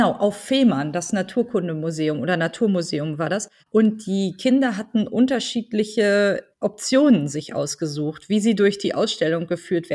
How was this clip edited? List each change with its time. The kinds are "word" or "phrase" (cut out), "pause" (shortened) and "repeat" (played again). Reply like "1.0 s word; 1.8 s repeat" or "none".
3.6 s pause; 6.5 s pause